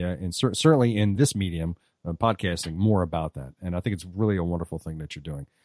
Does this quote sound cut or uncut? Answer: uncut